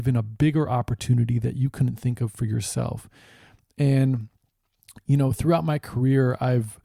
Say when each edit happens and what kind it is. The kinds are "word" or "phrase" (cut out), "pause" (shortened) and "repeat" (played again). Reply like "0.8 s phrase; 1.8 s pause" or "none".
none